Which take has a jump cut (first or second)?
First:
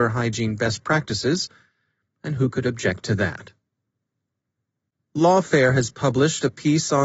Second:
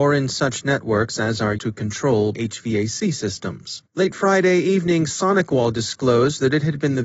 second